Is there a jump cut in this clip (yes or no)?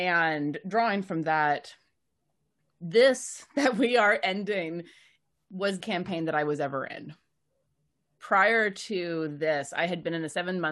yes